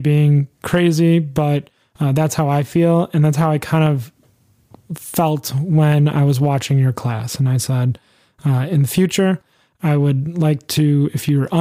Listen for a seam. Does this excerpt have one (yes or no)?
no